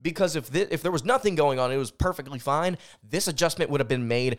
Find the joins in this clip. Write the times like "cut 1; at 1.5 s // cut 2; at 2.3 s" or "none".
none